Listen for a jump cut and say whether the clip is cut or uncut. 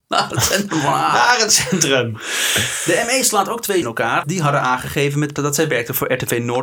cut